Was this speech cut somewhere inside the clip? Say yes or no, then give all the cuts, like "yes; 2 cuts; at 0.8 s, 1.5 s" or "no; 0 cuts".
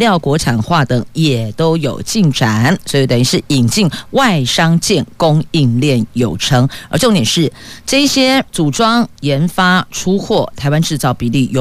yes; 2 cuts; at 8.5 s, 9.2 s